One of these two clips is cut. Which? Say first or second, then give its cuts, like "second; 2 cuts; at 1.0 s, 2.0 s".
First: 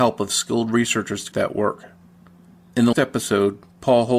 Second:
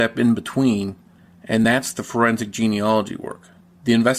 first; 2 cuts; at 1.3 s, 2.9 s